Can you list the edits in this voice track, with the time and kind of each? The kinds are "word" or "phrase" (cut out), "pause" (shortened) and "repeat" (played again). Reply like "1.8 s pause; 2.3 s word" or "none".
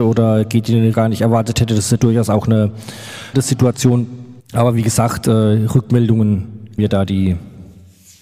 0.9 s phrase; 3.3 s word; 4.4 s pause; 6.8 s word